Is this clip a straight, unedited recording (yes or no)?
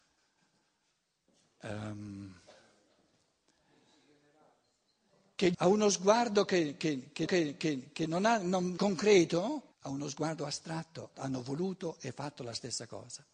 no